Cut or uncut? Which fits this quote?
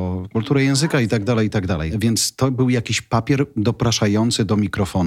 uncut